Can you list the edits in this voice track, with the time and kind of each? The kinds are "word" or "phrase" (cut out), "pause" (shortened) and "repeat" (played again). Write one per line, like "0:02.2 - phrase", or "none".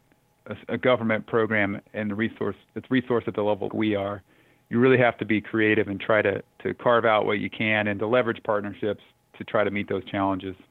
0:03.7 - word